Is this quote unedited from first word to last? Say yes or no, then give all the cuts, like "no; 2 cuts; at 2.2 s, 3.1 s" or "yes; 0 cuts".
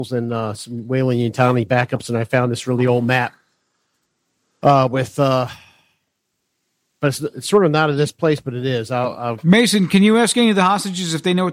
yes; 0 cuts